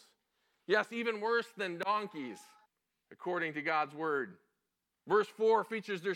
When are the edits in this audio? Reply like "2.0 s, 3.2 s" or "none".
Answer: 2.7 s